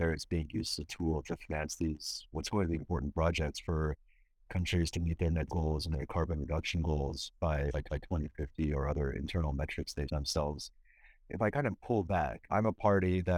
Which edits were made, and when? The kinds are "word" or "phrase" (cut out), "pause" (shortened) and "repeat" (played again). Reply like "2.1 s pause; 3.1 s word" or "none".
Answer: 2.3 s word; 2.8 s word; 5.5 s word; 7.9 s repeat; 10.1 s word; 12.5 s pause

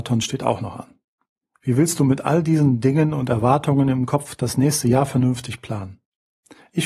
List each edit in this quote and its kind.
1.3 s pause

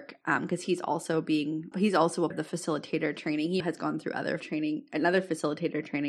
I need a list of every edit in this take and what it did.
1.7 s word; 2.3 s word; 3.6 s word; 4.4 s word

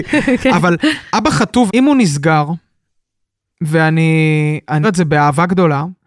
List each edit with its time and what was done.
1.7 s word; 4.8 s word

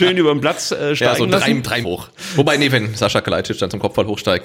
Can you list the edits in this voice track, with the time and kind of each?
1.8 s word

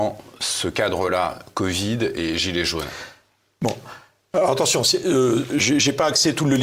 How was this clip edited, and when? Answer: none

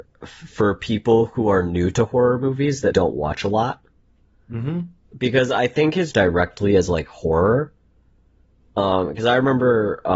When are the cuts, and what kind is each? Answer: 2.9 s word; 6.1 s phrase

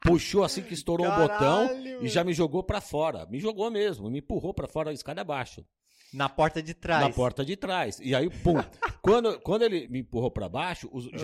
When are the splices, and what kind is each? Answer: 9.9 s word

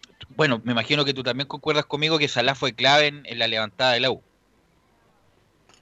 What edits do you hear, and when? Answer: none

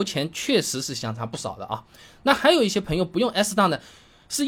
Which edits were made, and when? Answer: none

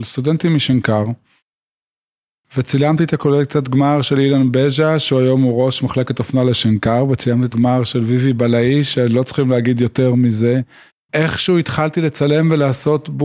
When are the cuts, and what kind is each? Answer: 7.5 s word

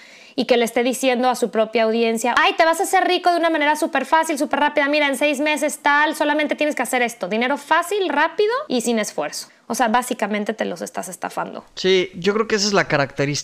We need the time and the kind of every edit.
none

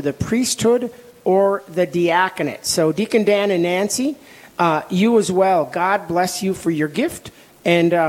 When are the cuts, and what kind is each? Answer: none

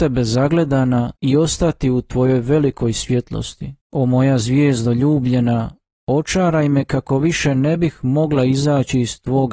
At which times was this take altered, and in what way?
1.2 s pause; 3.8 s pause

